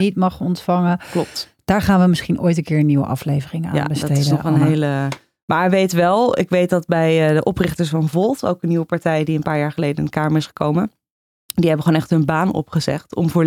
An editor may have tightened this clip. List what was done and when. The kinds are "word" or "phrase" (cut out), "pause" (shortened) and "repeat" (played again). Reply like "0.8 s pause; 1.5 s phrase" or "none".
none